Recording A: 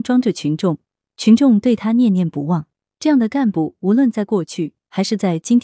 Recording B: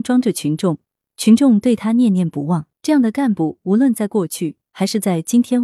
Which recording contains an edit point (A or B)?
B